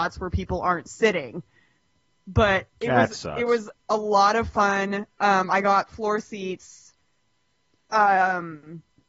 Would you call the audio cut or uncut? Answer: uncut